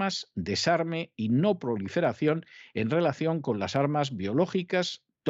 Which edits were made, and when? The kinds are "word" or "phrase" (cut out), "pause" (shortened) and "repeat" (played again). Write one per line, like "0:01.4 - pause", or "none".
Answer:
none